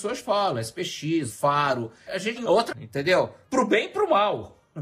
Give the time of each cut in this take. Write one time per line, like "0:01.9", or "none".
0:01.3
0:02.4
0:02.7